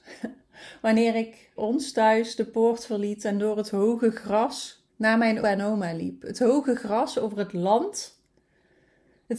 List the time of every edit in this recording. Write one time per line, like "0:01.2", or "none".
0:01.6
0:04.9
0:05.4

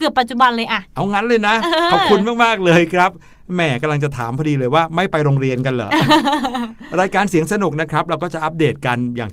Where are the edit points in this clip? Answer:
none

